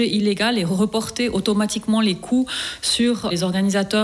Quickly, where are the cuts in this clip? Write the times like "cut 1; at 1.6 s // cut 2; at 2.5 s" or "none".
none